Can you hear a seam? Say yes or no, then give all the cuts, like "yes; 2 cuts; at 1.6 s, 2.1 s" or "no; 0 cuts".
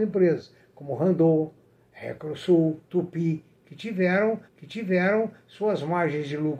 yes; 2 cuts; at 2.8 s, 4.5 s